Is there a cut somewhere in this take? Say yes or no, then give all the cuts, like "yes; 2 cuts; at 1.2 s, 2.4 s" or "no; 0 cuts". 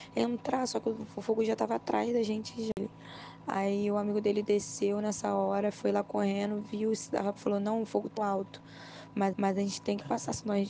yes; 3 cuts; at 7.4 s, 8.2 s, 9.3 s